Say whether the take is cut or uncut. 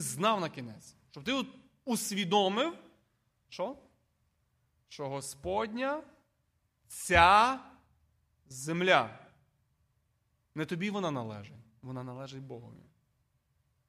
uncut